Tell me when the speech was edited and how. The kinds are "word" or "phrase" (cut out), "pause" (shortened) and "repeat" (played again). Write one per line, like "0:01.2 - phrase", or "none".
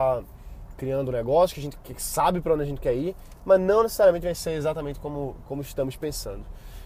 none